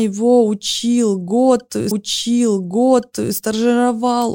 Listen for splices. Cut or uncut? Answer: cut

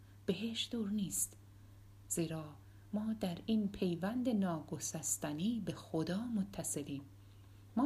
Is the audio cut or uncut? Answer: uncut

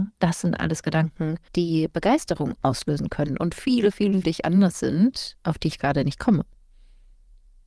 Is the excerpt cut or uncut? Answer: cut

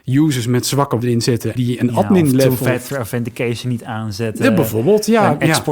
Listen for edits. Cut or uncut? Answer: cut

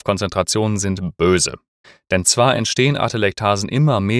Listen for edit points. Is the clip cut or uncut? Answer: uncut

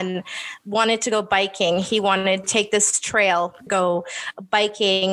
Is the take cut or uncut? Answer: cut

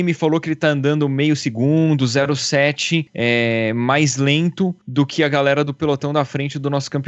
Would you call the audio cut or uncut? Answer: uncut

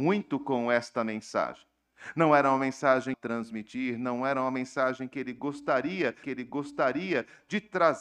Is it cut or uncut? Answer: cut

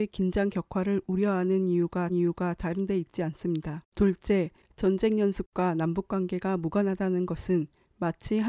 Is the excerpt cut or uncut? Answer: cut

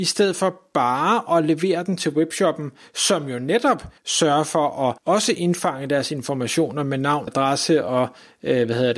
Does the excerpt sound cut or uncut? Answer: cut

